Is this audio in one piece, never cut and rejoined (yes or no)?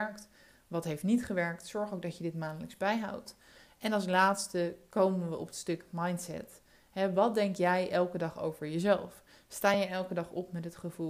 yes